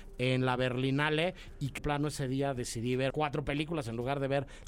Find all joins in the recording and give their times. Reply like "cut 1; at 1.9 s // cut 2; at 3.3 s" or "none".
cut 1; at 1.8 s // cut 2; at 3.1 s